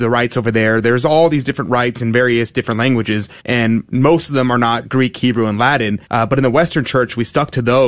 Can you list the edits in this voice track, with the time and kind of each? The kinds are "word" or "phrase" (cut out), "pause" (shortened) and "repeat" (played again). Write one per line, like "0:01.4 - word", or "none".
0:03.4 - pause
0:06.1 - pause